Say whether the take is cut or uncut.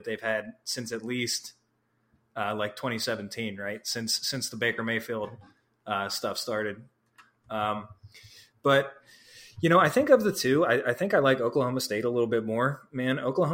uncut